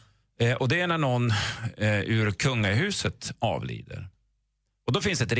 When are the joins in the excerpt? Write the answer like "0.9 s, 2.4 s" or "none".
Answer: none